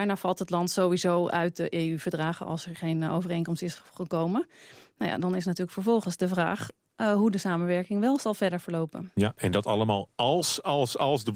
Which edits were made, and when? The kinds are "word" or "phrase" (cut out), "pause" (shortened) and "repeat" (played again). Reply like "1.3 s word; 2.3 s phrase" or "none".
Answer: none